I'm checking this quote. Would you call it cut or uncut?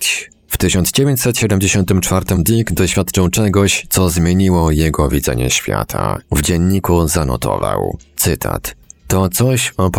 cut